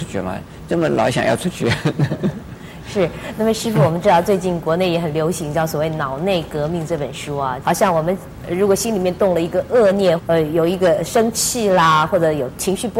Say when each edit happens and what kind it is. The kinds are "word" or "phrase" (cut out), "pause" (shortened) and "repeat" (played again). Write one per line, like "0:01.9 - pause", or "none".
0:07.6 - phrase
0:10.2 - phrase